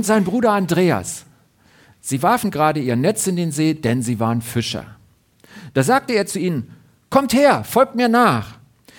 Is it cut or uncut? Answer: uncut